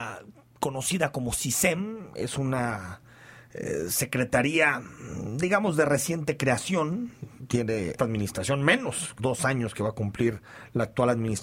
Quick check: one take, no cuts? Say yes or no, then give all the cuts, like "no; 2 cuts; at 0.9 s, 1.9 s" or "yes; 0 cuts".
no; 2 cuts; at 8.0 s, 9.2 s